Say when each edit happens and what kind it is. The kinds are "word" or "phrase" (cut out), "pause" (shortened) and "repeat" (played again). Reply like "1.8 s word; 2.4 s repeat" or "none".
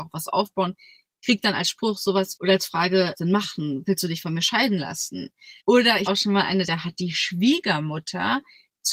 2.4 s word; 3.1 s phrase; 5.6 s pause; 6.1 s word; 6.7 s word